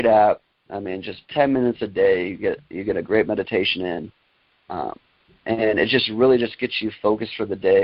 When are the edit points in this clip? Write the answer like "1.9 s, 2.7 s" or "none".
none